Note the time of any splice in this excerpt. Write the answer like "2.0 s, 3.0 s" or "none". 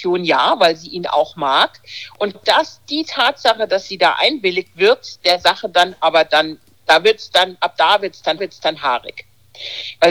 2.3 s, 6.7 s, 8.4 s